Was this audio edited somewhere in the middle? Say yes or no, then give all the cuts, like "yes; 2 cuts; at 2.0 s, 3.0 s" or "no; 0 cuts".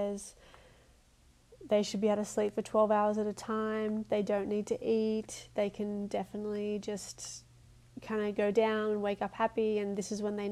no; 0 cuts